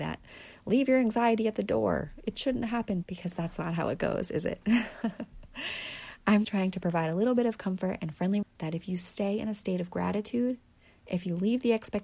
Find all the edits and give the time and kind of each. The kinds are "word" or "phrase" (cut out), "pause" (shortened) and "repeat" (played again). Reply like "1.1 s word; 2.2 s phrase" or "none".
3.0 s word; 6.4 s word; 8.4 s word

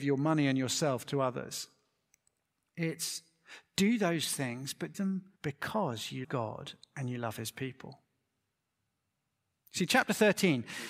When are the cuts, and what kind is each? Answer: 4.9 s word; 5.4 s pause; 6.2 s word

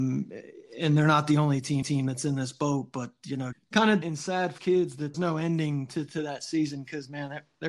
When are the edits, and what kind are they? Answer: 1.8 s repeat; 3.5 s word; 4.0 s word; 4.6 s word; 5.1 s phrase

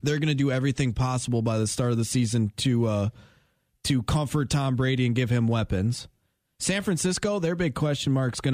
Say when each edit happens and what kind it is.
none

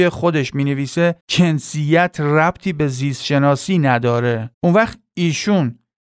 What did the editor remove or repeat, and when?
1.2 s pause; 4.5 s pause

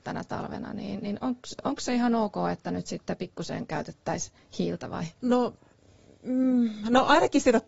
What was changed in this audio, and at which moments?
5.1 s pause

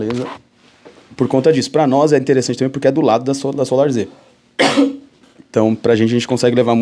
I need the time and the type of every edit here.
none

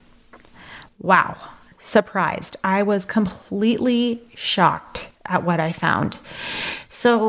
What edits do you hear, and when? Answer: none

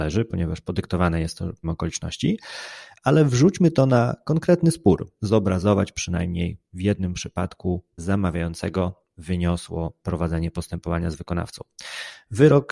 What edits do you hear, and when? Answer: 1.6 s word; 5.1 s word; 8.0 s word

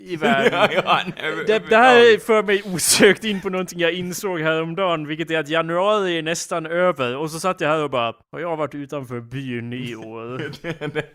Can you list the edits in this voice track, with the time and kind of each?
8.2 s pause

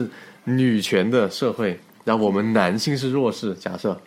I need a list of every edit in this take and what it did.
none

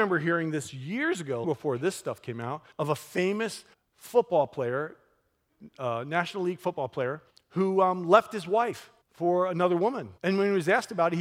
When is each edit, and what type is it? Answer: 1.4 s word; 2.7 s pause; 3.7 s pause; 7.3 s pause; 9.0 s pause; 10.2 s pause

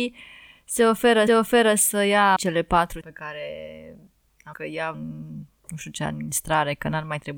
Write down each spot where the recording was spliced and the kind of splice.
1.3 s repeat; 2.4 s phrase; 3.0 s word; 4.5 s word; 4.9 s phrase

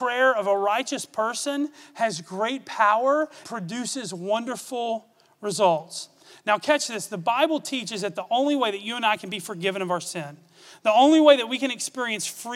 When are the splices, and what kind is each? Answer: 3.4 s word

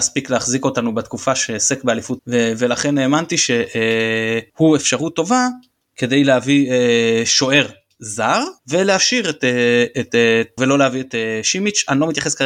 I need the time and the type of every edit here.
2.2 s word; 10.6 s word

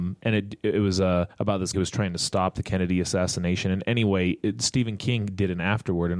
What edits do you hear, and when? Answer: 1.3 s pause; 1.7 s word

